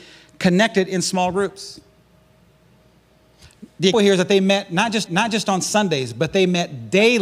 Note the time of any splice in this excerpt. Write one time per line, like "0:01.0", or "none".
0:03.9
0:05.1